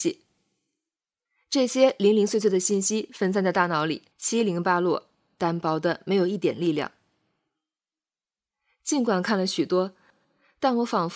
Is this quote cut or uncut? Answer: cut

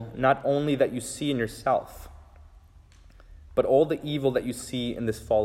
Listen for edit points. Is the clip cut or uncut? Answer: uncut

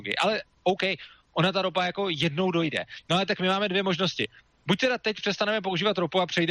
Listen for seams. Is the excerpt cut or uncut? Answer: uncut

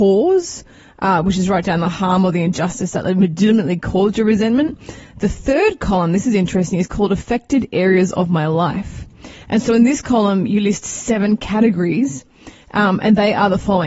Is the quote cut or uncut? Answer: uncut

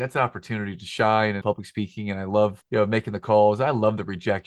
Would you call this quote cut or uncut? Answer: cut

